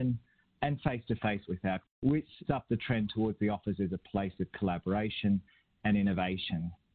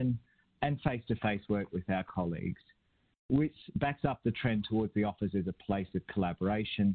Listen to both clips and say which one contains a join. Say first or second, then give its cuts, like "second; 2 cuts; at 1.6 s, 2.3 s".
first; 3 cuts; at 1.4 s, 1.8 s, 2.4 s